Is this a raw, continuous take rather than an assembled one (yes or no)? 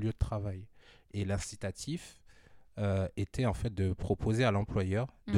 yes